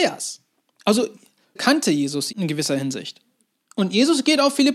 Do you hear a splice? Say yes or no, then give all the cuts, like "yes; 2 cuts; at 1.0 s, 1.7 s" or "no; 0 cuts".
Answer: yes; 2 cuts; at 1.6 s, 2.3 s